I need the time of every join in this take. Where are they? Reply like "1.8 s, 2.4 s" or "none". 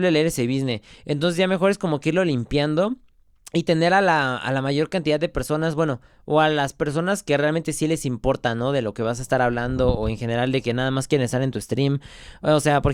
3.3 s